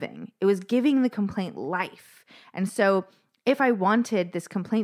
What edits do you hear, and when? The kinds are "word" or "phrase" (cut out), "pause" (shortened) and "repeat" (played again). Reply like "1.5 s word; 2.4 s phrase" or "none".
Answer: none